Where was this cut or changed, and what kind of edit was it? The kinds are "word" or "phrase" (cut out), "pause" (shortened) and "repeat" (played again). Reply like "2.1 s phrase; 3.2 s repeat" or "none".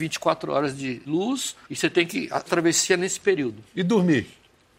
1.1 s word; 1.6 s pause; 2.5 s phrase